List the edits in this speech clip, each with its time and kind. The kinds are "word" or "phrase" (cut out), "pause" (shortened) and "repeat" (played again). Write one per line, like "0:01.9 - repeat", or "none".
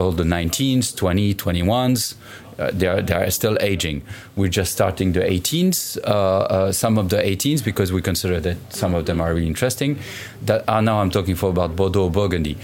none